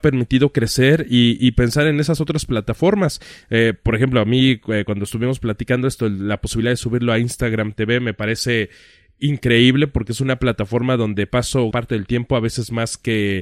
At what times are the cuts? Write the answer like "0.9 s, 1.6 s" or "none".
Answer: 11.7 s